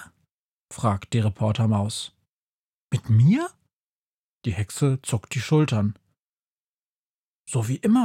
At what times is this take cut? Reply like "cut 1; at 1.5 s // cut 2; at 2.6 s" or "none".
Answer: none